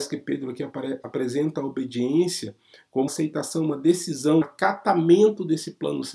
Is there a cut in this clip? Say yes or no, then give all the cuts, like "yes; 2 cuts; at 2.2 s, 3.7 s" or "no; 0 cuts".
yes; 2 cuts; at 3.1 s, 4.4 s